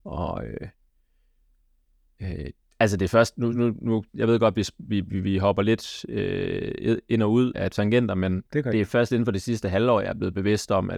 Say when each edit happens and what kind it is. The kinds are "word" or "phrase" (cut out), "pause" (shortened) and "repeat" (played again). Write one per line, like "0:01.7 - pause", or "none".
0:04.1 - pause
0:07.5 - word
0:08.5 - pause